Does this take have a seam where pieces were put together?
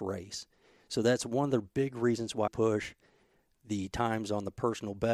yes; 1 cut; at 2.5 s

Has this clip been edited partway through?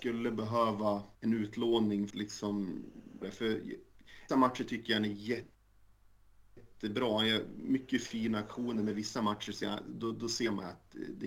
yes; 4 cuts; at 1.1 s, 2.1 s, 3.2 s, 4.3 s

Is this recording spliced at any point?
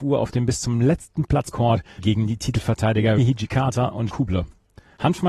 yes; 4 cuts; at 1.5 s, 2.0 s, 3.2 s, 4.1 s

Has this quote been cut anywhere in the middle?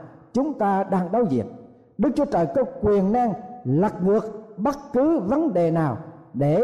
no; 0 cuts

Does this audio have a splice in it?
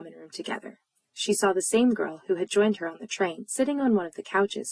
no; 0 cuts

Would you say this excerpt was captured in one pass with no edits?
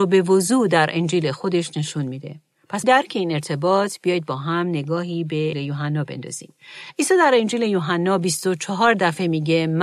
no; 2 cuts; at 2.8 s, 5.5 s

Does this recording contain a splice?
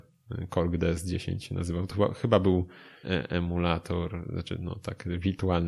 yes; 1 cut; at 3.0 s

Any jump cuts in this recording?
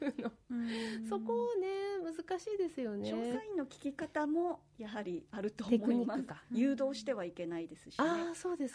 yes; 1 cut; at 6.4 s

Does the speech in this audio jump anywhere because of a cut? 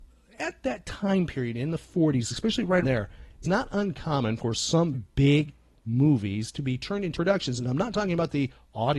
yes; 4 cuts; at 2.8 s, 3.4 s, 4.9 s, 7.1 s

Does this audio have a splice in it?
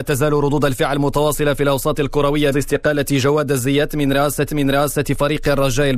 yes; 2 cuts; at 2.5 s, 4.5 s

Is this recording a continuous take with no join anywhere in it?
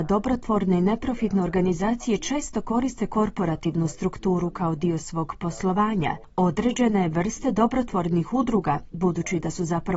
yes; 0 cuts

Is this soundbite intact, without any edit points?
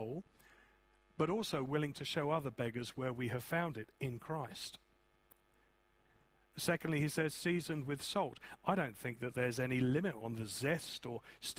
yes; 0 cuts

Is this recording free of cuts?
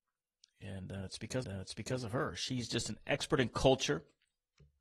no; 1 cut; at 1.4 s

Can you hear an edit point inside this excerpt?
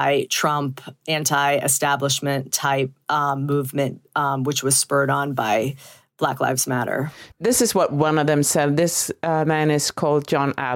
yes; 1 cut; at 7.3 s

